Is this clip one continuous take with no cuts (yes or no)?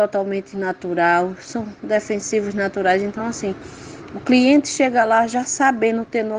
yes